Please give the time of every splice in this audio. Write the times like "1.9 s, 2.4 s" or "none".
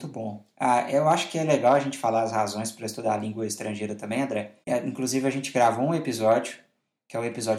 4.6 s